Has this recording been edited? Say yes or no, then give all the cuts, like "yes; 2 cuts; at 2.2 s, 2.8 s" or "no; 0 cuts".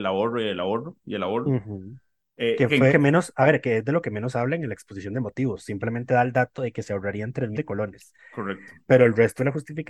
yes; 2 cuts; at 2.9 s, 7.5 s